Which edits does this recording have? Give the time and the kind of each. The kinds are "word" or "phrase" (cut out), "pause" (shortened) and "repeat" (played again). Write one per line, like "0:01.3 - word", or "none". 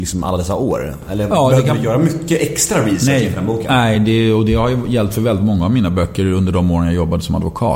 none